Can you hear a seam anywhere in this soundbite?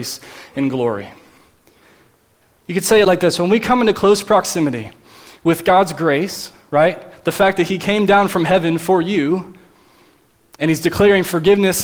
no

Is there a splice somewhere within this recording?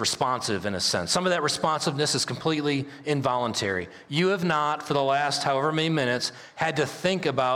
no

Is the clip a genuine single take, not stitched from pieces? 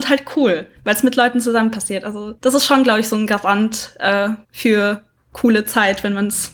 no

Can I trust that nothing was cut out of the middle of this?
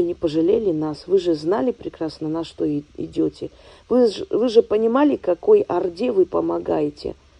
yes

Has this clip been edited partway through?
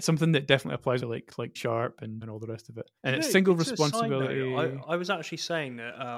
yes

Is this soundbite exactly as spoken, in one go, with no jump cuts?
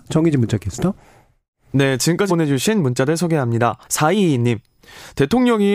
no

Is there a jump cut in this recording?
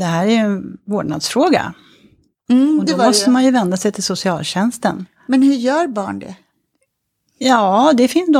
no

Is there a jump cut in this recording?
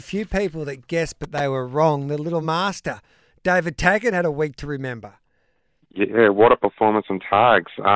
no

